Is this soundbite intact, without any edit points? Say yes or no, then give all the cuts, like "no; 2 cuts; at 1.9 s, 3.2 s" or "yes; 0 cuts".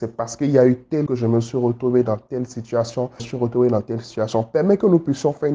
no; 2 cuts; at 1.1 s, 3.2 s